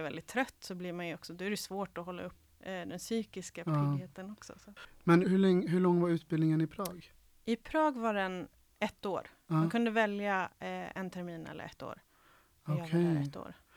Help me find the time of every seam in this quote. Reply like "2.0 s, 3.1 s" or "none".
2.5 s, 5.2 s